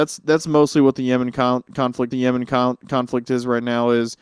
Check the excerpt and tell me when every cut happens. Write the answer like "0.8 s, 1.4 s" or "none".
2.1 s